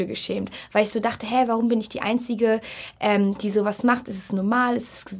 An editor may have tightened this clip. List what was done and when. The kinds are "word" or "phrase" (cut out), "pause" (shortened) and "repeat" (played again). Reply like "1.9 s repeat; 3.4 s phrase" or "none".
none